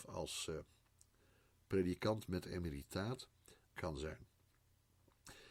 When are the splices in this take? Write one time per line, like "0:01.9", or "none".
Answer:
0:03.7